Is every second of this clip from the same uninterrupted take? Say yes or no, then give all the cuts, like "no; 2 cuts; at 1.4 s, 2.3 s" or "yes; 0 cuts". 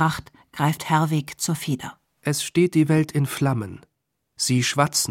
yes; 0 cuts